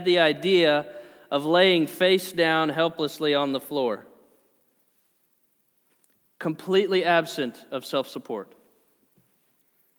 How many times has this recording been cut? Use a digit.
0